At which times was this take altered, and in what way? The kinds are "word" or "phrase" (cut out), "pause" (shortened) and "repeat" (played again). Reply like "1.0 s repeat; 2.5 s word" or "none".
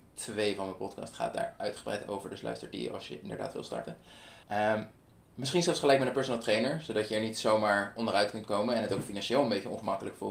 4.4 s pause